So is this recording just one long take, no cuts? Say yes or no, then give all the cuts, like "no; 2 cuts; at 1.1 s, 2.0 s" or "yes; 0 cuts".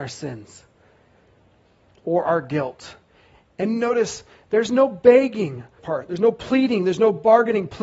no; 1 cut; at 5.8 s